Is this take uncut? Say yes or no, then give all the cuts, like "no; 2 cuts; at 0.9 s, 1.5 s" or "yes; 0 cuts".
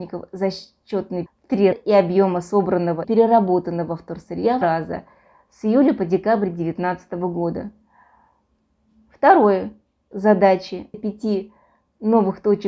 no; 6 cuts; at 1.3 s, 1.7 s, 3.0 s, 4.6 s, 10.1 s, 10.9 s